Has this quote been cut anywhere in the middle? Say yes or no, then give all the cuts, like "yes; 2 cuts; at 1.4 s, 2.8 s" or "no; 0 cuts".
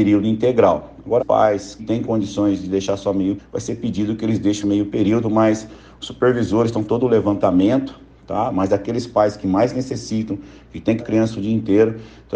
yes; 6 cuts; at 1.2 s, 1.8 s, 3.4 s, 4.6 s, 6.8 s, 11.0 s